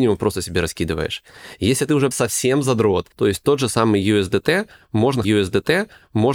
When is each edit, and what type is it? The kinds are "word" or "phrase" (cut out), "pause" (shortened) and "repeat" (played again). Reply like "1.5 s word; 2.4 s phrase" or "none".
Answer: 2.1 s word; 3.1 s pause; 5.2 s repeat